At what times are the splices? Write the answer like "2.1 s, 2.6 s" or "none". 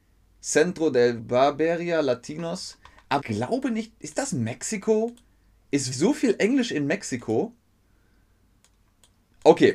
1.2 s, 3.2 s, 5.9 s